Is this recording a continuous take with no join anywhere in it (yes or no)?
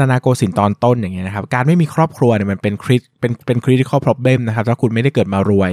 yes